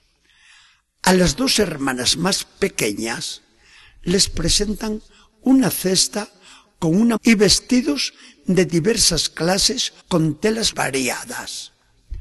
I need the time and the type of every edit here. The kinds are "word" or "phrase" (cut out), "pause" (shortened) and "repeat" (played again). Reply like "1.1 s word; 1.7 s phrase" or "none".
7.2 s word; 10.0 s pause; 10.7 s word